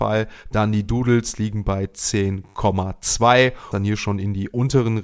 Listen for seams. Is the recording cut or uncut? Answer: cut